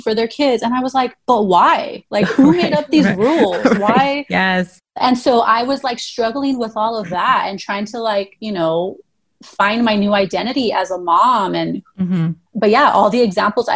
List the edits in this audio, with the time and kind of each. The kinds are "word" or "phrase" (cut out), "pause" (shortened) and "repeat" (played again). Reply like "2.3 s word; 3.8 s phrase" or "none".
none